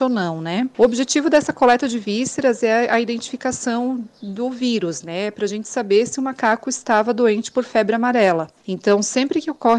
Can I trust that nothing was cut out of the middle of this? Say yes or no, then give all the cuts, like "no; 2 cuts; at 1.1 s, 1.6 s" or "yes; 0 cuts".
yes; 0 cuts